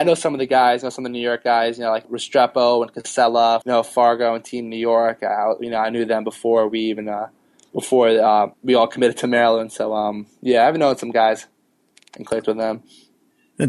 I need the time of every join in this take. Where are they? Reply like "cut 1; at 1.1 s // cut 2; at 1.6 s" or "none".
cut 1; at 2.0 s // cut 2; at 3.6 s // cut 3; at 8.5 s